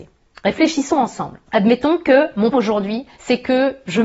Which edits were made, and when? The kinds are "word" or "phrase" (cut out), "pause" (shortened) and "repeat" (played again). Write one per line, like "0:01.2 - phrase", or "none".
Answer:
0:01.5 - pause
0:02.5 - word
0:03.1 - pause